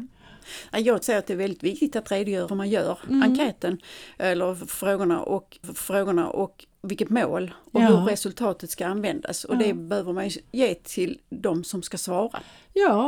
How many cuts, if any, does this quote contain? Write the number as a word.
three